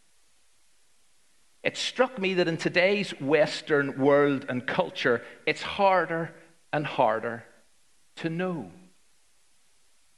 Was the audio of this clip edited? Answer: no; 0 cuts

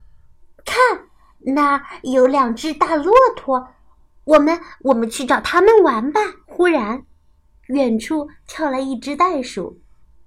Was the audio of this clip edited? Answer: yes; 1 cut; at 6.4 s

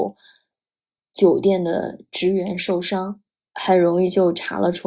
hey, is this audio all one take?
yes; 0 cuts

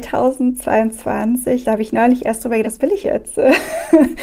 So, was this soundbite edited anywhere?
yes; 3 cuts; at 1.6 s, 2.6 s, 3.0 s

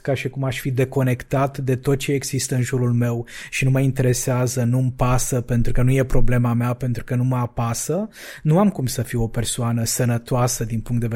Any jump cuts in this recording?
no; 0 cuts

